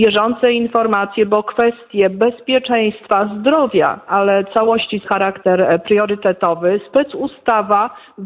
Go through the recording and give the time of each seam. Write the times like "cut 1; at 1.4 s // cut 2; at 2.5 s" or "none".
cut 1; at 4.1 s // cut 2; at 5.0 s